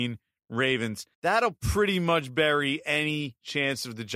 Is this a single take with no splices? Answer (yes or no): no